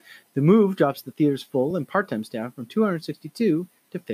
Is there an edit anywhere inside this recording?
no; 0 cuts

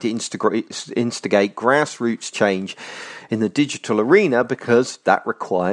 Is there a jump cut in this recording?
no; 0 cuts

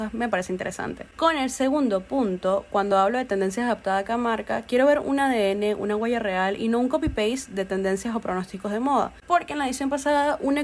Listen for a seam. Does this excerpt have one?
no; 0 cuts

